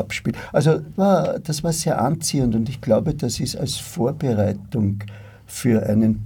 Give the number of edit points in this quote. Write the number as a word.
one